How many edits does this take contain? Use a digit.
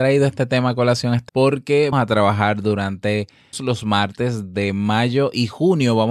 3